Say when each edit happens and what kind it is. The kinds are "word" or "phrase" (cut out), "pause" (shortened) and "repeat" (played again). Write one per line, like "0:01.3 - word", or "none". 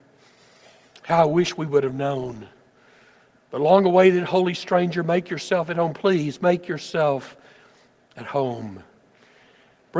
none